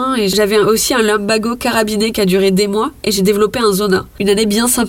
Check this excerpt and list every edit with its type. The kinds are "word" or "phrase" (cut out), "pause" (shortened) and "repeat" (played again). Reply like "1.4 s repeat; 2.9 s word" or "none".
none

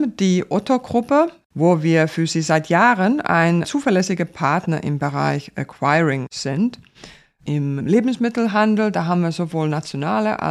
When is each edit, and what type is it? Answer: 3.6 s word; 7.8 s word

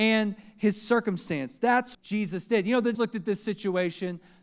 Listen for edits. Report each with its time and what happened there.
1.9 s word; 2.9 s word

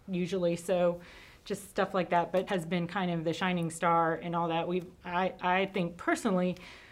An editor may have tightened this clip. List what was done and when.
2.5 s word

